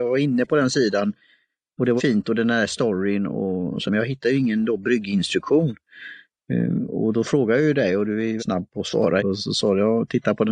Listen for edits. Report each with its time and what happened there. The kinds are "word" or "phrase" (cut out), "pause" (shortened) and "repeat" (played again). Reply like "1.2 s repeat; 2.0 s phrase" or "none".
2.0 s word; 3.9 s word; 8.4 s word; 9.2 s phrase